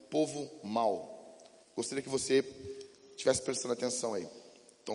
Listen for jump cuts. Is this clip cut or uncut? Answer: uncut